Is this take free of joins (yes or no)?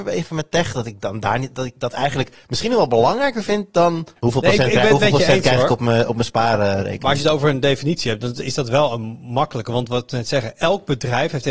no